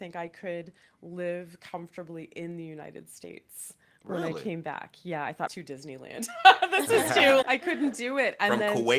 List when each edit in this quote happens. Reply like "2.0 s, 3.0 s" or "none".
5.5 s, 7.4 s